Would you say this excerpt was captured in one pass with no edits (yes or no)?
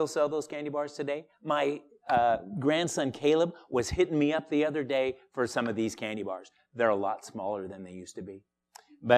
yes